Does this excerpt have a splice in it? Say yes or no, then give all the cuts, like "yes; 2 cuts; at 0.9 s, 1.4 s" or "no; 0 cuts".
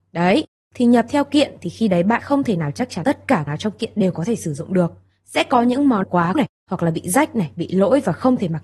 yes; 5 cuts; at 2.2 s, 3.0 s, 3.5 s, 6.0 s, 6.3 s